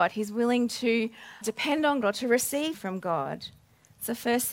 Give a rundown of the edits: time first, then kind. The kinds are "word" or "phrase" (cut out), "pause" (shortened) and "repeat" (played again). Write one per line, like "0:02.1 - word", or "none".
0:01.4 - word
0:02.0 - word
0:02.7 - word